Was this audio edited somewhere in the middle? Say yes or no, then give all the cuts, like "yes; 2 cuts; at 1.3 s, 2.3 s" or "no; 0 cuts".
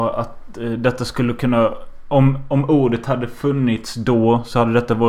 no; 0 cuts